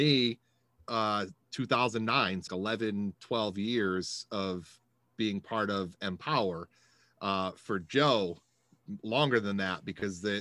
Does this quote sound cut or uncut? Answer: cut